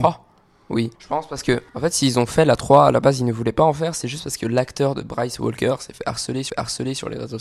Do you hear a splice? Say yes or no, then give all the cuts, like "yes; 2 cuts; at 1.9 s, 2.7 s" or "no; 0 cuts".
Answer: yes; 3 cuts; at 1.0 s, 1.7 s, 6.5 s